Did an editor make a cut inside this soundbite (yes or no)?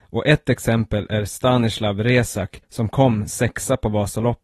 yes